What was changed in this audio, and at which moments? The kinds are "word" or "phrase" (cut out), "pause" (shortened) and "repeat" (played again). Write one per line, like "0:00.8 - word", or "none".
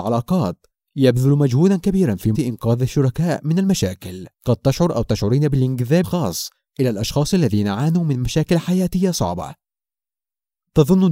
0:02.3 - word
0:04.3 - pause
0:06.0 - word